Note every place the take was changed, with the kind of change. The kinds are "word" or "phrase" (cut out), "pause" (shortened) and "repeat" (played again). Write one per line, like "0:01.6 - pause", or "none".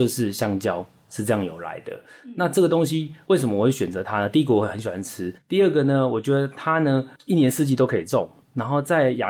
0:05.4 - pause
0:07.2 - pause